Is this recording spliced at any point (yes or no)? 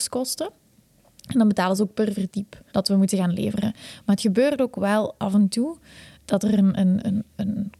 yes